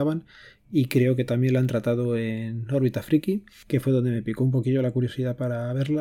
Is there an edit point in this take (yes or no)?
no